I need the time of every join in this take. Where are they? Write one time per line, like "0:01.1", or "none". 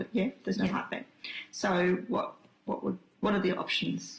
none